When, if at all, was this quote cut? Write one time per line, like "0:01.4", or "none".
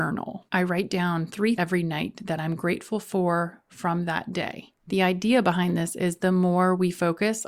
0:01.6